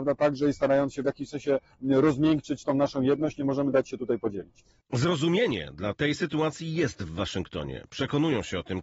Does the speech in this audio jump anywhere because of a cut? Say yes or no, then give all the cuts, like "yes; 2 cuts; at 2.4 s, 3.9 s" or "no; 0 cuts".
no; 0 cuts